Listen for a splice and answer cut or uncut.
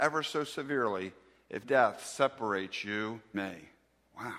cut